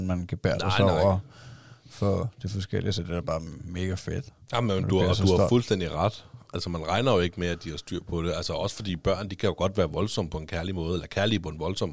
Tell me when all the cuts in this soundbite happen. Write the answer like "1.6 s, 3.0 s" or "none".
none